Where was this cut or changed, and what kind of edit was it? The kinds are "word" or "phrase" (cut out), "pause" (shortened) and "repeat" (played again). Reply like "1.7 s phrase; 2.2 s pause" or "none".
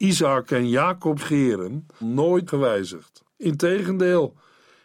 1.2 s word; 2.0 s word; 2.5 s word; 3.3 s pause

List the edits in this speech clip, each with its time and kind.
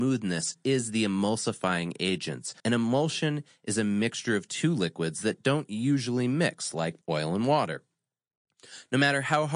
2.6 s pause; 7.0 s pause

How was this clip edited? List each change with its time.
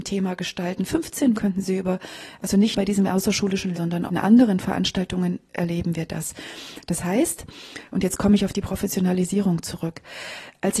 1.3 s word; 2.7 s word; 3.7 s word; 4.1 s word

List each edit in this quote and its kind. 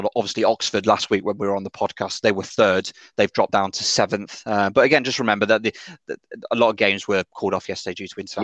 3.5 s word

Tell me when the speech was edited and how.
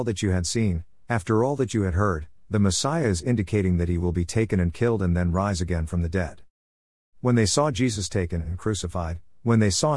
none

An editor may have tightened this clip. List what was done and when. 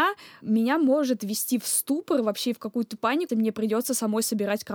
3.3 s word

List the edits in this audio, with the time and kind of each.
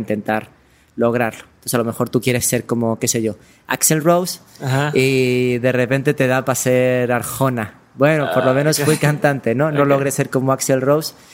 none

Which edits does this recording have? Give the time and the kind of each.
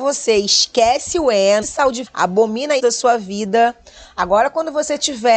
1.6 s word; 2.1 s word; 2.8 s word

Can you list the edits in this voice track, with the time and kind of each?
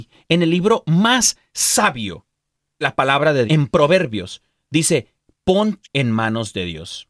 2.8 s word; 3.5 s word; 5.8 s word

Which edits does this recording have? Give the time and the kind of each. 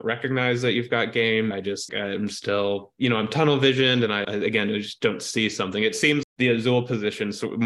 1.5 s word; 1.9 s word; 4.2 s word; 6.2 s word

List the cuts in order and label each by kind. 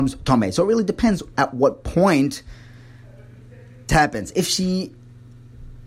3.9 s word

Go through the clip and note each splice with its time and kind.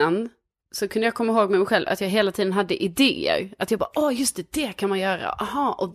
none

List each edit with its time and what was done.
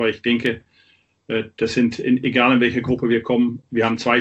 none

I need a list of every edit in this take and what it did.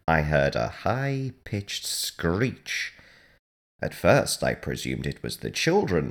none

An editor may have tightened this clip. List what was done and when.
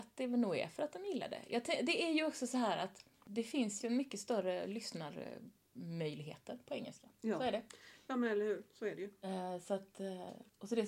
3.1 s pause; 3.8 s phrase; 8.7 s pause

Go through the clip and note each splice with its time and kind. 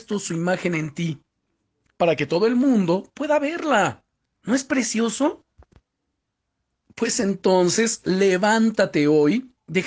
none

